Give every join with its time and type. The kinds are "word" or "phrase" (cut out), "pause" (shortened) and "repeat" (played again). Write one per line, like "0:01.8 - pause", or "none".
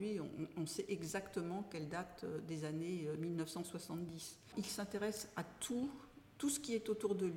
none